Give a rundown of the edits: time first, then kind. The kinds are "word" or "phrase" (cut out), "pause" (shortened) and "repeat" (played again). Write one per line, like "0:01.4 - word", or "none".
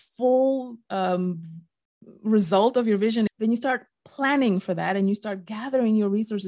0:02.2 - pause
0:03.3 - word